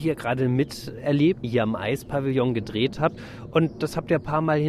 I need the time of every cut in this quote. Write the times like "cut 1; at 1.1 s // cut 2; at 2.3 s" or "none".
cut 1; at 1.4 s